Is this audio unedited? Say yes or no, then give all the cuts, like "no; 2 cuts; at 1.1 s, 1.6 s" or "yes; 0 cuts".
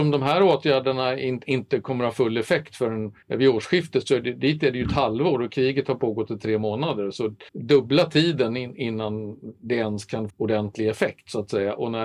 no; 3 cuts; at 3.2 s, 7.5 s, 10.3 s